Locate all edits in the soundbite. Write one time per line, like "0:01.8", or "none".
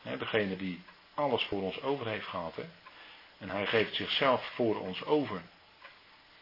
none